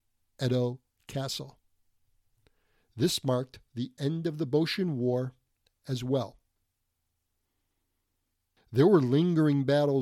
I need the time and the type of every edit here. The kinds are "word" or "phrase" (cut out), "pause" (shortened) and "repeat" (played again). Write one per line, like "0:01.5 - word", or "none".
none